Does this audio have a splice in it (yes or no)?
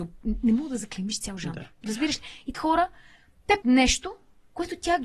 yes